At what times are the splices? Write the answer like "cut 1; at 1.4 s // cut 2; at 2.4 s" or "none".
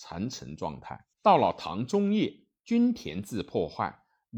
cut 1; at 1.1 s

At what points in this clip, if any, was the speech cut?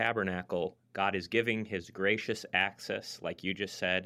none

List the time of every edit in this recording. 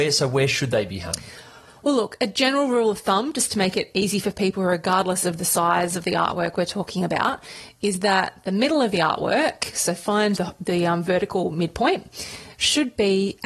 cut 1; at 10.4 s

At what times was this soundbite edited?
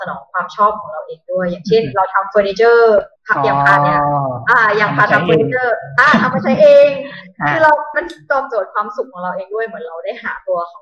cut 1; at 3.2 s // cut 2; at 7.9 s

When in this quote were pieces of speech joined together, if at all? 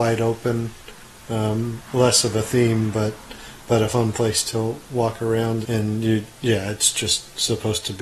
cut 1; at 1.9 s // cut 2; at 5.6 s

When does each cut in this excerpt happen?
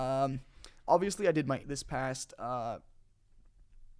cut 1; at 1.6 s

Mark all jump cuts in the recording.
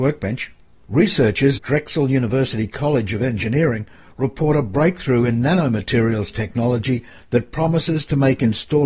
cut 1; at 1.6 s

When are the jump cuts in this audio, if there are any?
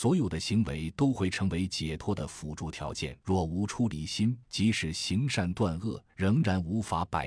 cut 1; at 3.2 s // cut 2; at 4.4 s // cut 3; at 6.1 s

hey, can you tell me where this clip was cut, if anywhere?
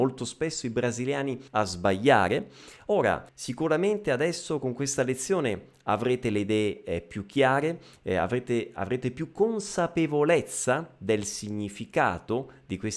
cut 1; at 1.5 s // cut 2; at 3.3 s

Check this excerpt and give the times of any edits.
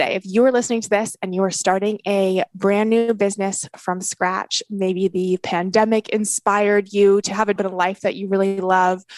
cut 1; at 7.6 s

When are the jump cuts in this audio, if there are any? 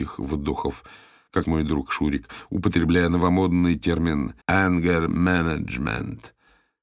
cut 1; at 1.4 s // cut 2; at 4.4 s

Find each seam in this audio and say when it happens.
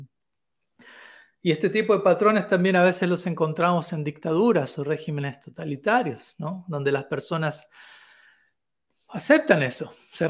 none

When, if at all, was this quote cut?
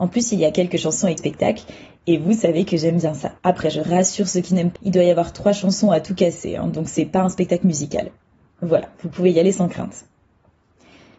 cut 1; at 1.2 s // cut 2; at 3.4 s // cut 3; at 4.8 s

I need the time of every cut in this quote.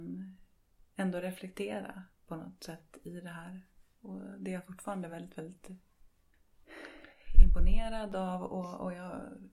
none

